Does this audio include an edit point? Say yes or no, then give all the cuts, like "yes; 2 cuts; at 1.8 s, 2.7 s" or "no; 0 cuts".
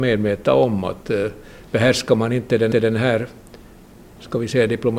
yes; 1 cut; at 2.7 s